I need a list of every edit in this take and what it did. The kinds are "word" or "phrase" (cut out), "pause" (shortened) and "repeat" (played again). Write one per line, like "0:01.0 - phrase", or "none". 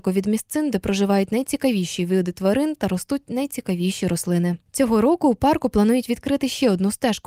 none